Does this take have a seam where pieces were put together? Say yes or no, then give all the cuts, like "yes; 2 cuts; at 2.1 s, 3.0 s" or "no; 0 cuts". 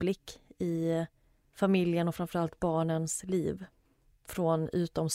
no; 0 cuts